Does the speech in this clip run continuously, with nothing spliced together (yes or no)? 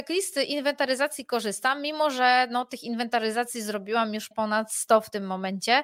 no